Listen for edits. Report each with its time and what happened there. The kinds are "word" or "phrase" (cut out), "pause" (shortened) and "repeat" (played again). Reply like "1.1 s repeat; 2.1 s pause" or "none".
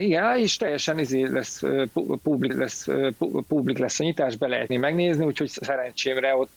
2.5 s repeat; 4.7 s word